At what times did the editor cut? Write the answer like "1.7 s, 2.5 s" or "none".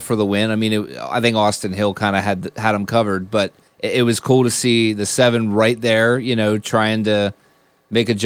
3.7 s